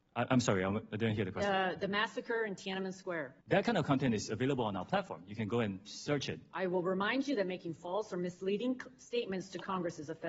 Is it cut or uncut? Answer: cut